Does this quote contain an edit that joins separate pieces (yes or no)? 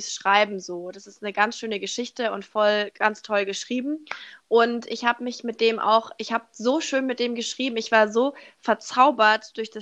no